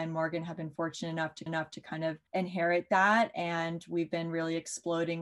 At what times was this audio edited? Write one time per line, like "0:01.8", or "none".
0:01.5
0:02.3